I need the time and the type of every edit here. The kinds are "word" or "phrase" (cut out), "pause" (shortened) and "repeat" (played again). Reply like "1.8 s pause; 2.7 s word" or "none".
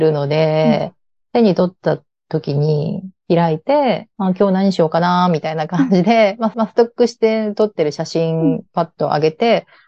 4.1 s pause; 6.5 s repeat